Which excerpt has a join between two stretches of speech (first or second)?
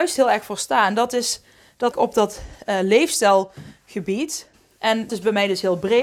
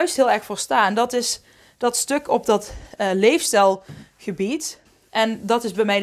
first